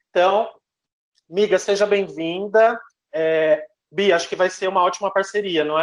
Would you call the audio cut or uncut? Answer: uncut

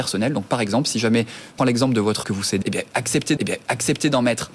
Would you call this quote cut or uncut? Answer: cut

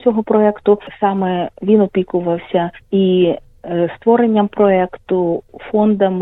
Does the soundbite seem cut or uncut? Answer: cut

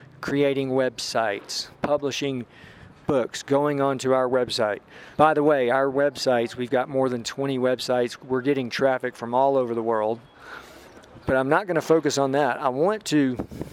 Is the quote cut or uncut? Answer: cut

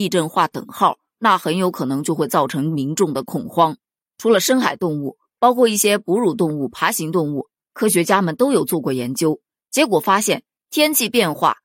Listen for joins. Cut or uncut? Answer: uncut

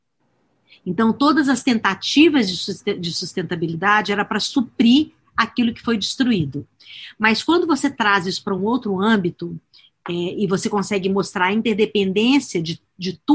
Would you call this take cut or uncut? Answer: uncut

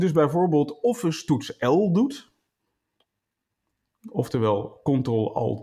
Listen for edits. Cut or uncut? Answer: uncut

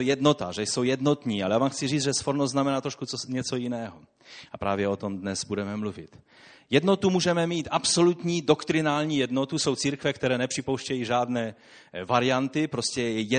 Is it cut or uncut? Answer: uncut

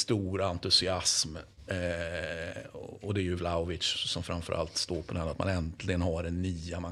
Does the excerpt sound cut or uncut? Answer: uncut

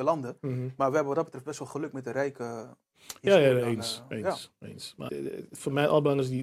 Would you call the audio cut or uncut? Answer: cut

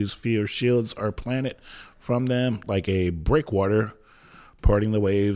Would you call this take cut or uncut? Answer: uncut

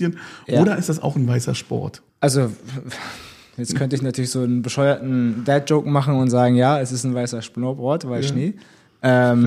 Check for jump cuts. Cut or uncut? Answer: cut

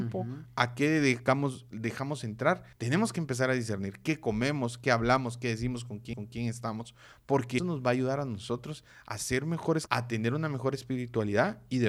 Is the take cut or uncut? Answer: cut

